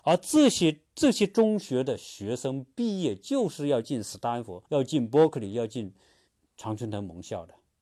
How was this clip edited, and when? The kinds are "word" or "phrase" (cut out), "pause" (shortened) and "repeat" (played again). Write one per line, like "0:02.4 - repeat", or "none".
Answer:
0:04.7 - pause
0:06.3 - pause